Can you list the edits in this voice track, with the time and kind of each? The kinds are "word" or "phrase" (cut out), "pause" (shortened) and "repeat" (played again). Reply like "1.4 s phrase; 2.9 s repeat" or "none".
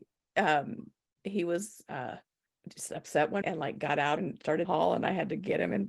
1.1 s pause; 2.5 s pause; 3.4 s word; 4.2 s phrase; 4.6 s phrase

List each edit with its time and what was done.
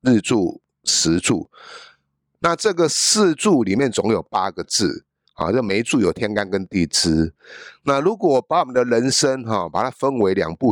none

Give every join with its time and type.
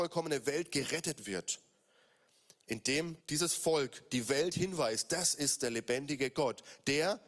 3.2 s pause

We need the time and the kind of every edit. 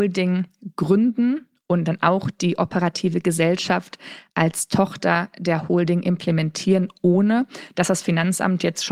none

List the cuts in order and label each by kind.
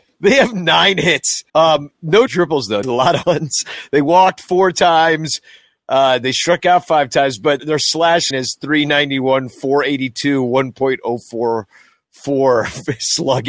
1.5 s pause; 2.3 s word; 2.8 s word; 3.2 s word; 7.6 s word; 8.3 s word

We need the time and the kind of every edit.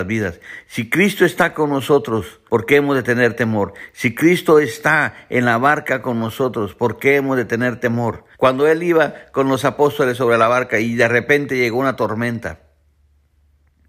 2.5 s pause; 8.3 s pause

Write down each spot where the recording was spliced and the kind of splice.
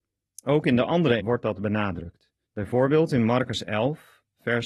1.2 s word; 2.4 s pause

